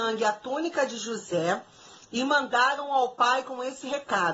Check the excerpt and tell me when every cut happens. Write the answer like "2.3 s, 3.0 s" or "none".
none